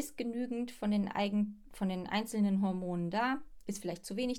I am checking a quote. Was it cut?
no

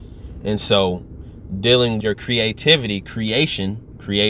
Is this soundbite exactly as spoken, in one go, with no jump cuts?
no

